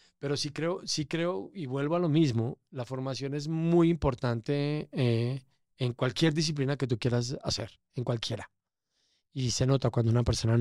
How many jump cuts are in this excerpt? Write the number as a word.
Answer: zero